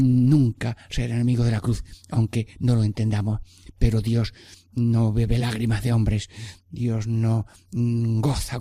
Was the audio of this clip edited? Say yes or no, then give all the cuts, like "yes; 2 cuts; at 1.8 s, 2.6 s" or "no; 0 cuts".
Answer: no; 0 cuts